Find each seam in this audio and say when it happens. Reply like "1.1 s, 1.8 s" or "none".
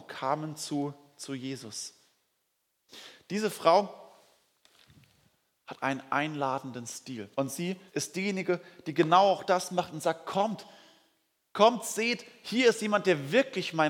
7.3 s, 7.9 s